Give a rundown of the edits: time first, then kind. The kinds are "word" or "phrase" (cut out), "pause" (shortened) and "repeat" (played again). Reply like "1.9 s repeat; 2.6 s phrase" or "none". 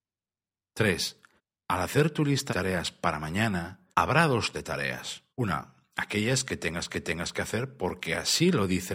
1.4 s pause; 2.5 s word; 3.9 s pause; 4.5 s word; 5.3 s pause; 6.9 s repeat